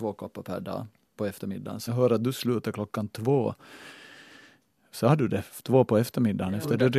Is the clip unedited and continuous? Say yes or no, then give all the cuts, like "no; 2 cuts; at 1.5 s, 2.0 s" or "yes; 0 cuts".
no; 2 cuts; at 1.2 s, 1.9 s